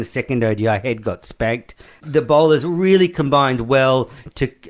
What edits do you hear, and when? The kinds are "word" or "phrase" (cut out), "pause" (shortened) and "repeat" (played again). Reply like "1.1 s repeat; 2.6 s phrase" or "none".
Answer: none